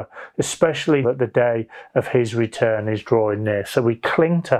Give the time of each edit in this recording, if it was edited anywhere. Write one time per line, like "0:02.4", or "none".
0:01.0